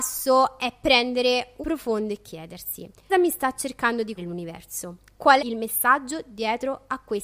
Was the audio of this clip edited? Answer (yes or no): yes